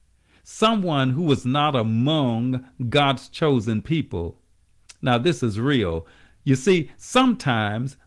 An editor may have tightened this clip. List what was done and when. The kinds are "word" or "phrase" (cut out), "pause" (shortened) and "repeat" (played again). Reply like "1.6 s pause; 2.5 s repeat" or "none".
none